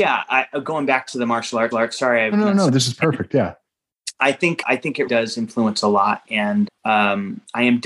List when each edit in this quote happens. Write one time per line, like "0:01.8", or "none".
0:01.7
0:02.3
0:04.6
0:05.1
0:06.2
0:06.7